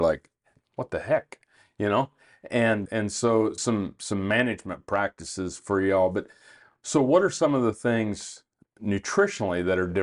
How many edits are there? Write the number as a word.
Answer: two